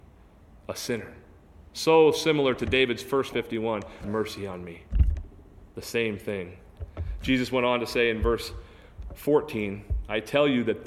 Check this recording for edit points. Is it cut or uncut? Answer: cut